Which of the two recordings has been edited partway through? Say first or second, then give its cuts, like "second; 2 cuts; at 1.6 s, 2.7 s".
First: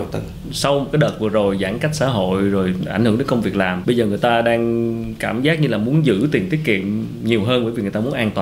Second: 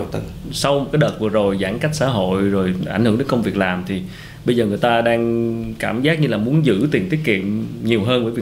first; 1 cut; at 3.8 s